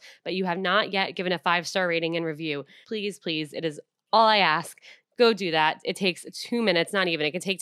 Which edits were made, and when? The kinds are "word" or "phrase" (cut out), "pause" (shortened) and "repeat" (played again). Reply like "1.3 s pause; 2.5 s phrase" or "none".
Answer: 2.8 s word